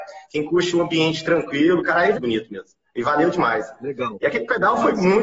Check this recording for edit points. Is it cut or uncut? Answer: cut